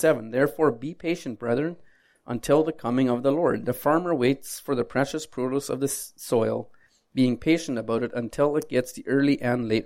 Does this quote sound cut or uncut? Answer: uncut